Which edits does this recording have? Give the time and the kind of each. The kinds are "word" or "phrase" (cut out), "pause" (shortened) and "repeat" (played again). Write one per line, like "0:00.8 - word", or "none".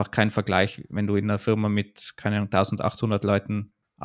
none